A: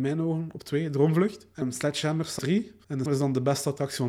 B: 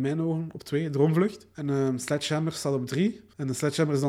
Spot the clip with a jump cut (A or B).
A